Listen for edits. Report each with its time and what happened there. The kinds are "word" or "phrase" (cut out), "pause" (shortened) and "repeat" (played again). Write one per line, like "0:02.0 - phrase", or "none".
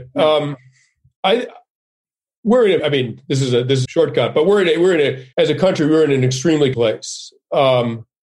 0:02.8 - word
0:03.8 - phrase
0:05.3 - pause
0:06.7 - word